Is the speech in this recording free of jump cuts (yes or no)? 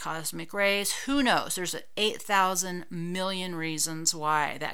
yes